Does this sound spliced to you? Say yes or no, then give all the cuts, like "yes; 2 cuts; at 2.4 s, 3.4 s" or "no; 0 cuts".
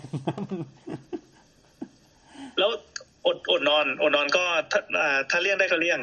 no; 0 cuts